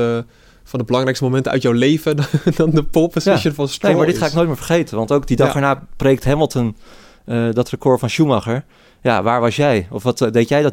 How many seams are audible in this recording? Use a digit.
0